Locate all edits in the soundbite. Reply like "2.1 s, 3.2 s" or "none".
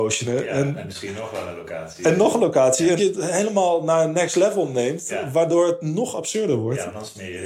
3.0 s